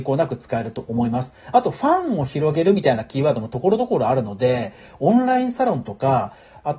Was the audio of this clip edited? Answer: no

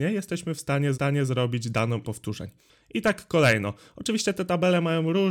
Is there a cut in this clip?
yes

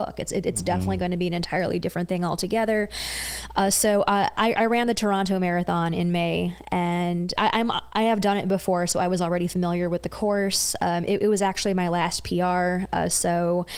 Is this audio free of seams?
no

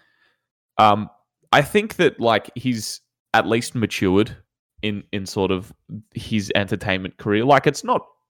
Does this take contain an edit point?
no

